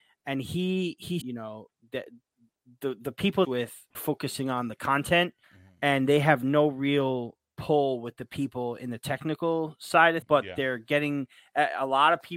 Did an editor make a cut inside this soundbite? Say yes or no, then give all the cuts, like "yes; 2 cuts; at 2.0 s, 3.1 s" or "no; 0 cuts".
yes; 7 cuts; at 1.2 s, 1.8 s, 3.4 s, 3.9 s, 5.4 s, 7.5 s, 10.2 s